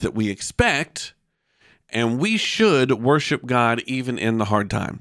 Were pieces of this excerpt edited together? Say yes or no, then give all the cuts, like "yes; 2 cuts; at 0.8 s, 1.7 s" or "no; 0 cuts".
no; 0 cuts